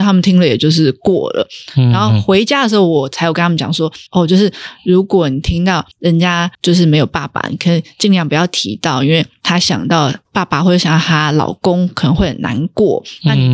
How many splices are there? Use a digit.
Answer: 4